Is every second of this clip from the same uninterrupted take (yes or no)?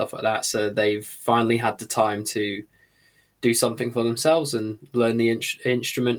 yes